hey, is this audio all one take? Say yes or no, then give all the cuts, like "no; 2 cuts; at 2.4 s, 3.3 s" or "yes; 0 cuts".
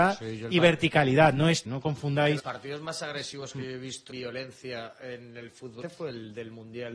no; 4 cuts; at 1.6 s, 2.4 s, 4.1 s, 5.8 s